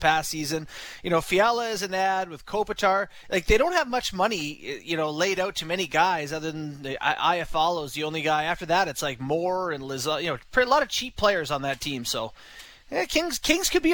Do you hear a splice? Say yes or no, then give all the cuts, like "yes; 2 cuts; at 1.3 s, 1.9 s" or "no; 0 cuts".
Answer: no; 0 cuts